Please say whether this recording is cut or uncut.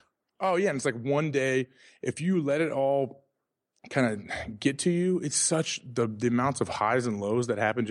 uncut